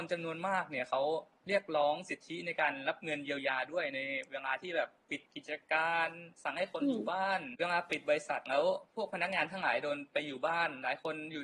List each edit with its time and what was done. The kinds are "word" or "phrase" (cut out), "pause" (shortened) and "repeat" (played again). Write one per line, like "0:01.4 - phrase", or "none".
0:05.3 - pause
0:06.3 - pause

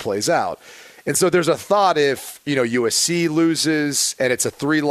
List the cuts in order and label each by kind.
none

